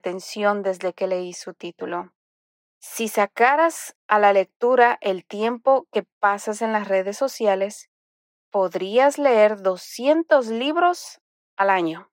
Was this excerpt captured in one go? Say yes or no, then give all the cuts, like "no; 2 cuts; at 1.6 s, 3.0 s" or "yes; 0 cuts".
yes; 0 cuts